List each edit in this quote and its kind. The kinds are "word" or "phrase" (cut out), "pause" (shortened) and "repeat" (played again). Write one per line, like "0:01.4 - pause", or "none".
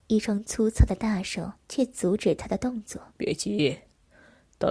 0:01.6 - pause
0:03.1 - pause